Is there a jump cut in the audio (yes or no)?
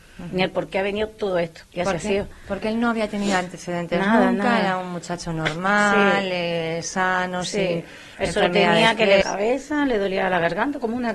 yes